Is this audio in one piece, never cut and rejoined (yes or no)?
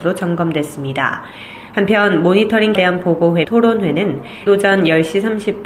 no